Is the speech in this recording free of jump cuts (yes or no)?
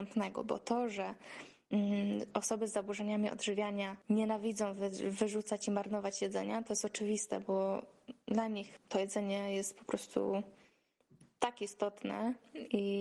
yes